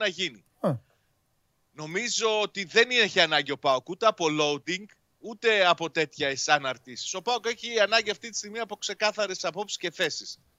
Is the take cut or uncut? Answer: uncut